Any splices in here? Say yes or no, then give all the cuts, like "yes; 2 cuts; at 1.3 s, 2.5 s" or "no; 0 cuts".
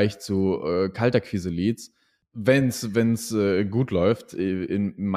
no; 0 cuts